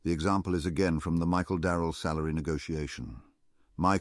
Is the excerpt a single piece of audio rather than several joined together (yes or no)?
yes